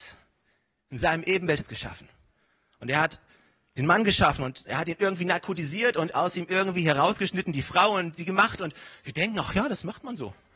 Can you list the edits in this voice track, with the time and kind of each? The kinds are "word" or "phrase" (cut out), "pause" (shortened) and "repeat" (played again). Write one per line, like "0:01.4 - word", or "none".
0:01.6 - phrase